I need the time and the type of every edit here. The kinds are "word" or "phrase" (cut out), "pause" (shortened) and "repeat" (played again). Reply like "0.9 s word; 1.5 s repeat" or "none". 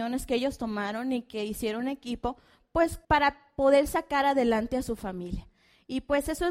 3.0 s pause